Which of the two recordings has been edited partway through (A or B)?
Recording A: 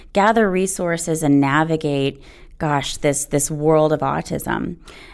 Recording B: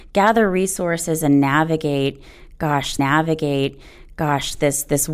B